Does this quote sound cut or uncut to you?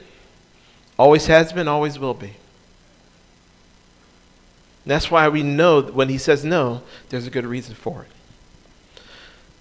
uncut